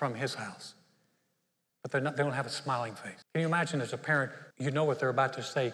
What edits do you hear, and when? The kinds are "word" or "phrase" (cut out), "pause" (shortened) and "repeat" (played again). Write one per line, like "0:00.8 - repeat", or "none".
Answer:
0:03.2 - pause
0:04.5 - pause